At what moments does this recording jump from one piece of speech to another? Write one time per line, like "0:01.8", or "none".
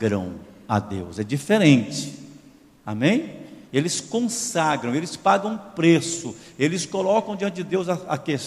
0:03.7